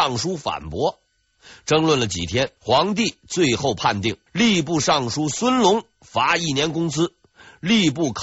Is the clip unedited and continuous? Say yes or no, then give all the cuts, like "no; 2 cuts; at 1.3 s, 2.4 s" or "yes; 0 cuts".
no; 2 cuts; at 2.6 s, 4.3 s